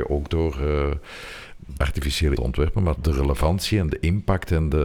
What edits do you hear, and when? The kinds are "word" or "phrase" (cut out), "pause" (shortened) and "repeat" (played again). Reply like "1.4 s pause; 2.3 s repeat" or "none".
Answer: 1.8 s word; 2.4 s phrase; 3.0 s word